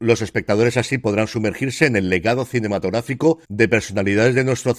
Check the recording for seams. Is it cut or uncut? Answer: uncut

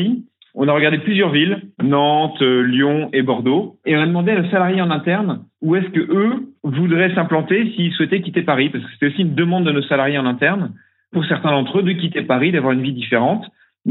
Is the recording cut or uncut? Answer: cut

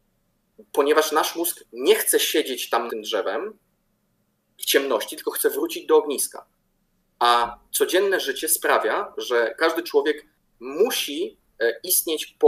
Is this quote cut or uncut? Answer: cut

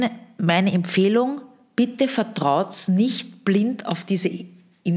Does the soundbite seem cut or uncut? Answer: uncut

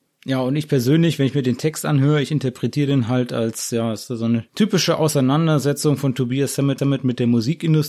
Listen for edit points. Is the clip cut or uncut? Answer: cut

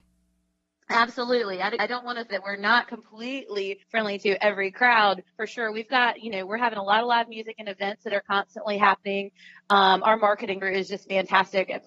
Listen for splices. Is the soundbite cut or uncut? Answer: cut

